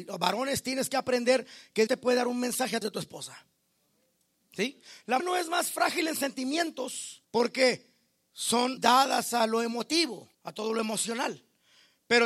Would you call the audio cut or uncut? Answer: cut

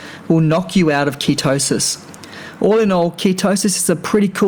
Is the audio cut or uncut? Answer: uncut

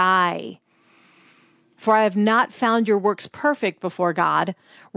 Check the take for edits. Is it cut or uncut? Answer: uncut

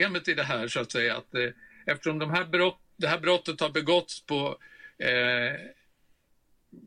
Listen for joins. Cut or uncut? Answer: uncut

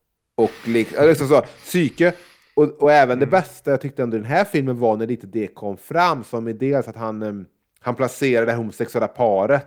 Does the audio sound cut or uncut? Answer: uncut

